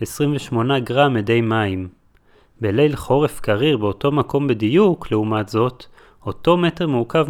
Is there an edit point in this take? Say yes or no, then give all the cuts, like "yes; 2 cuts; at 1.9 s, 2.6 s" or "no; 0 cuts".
no; 0 cuts